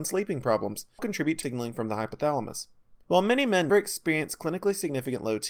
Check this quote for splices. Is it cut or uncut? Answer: cut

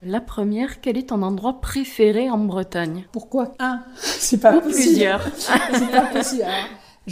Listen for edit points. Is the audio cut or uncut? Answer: cut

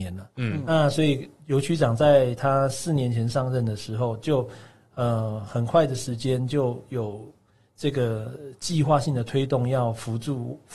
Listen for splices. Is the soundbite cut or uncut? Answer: uncut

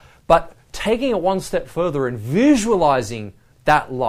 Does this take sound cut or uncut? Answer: uncut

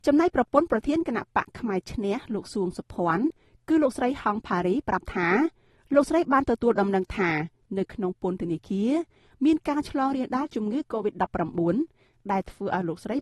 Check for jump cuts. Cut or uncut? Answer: uncut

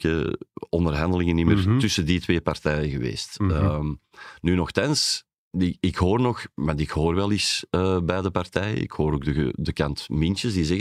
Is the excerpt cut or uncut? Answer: uncut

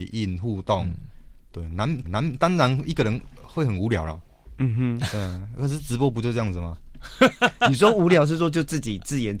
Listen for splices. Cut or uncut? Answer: cut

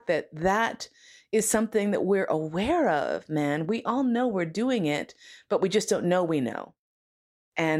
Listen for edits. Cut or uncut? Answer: uncut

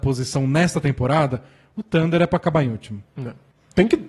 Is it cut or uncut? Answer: uncut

